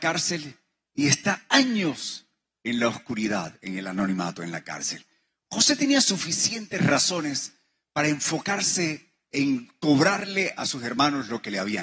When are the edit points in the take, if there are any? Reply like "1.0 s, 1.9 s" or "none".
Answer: none